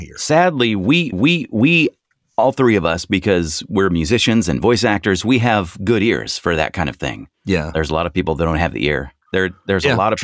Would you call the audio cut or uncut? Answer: cut